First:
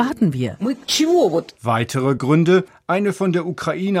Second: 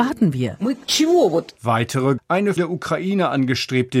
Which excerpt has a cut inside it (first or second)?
second